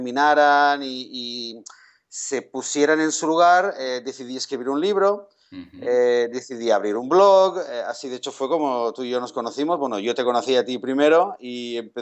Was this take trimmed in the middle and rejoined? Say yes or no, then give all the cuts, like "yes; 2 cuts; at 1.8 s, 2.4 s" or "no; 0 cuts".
no; 0 cuts